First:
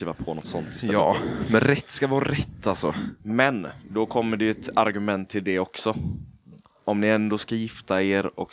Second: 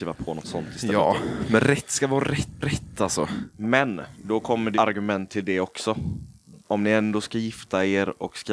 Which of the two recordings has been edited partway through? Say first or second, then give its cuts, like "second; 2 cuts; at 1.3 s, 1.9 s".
second; 3 cuts; at 2.6 s, 4.7 s, 6.6 s